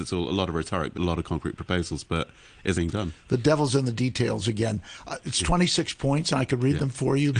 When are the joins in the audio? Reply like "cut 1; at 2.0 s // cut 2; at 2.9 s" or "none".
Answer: cut 1; at 0.9 s // cut 2; at 2.7 s